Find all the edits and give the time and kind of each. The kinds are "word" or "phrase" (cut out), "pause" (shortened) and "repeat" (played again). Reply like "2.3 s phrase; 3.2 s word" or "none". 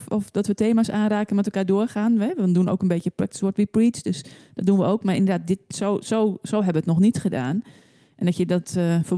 none